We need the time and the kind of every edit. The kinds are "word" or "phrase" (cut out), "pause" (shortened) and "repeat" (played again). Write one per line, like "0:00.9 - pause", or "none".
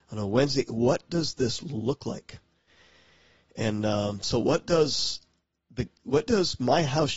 none